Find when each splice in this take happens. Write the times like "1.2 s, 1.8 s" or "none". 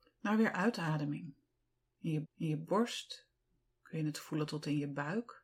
2.2 s